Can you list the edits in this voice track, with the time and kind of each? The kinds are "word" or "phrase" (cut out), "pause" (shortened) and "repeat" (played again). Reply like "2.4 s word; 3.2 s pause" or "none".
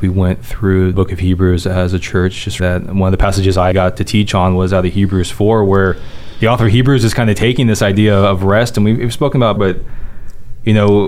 0.9 s word; 2.6 s word; 3.7 s word; 9.6 s word